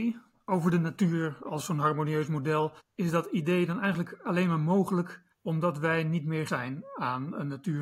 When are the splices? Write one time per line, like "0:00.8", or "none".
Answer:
0:02.8
0:05.3
0:06.5